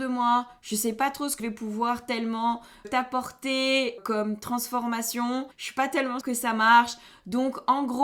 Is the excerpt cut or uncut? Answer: cut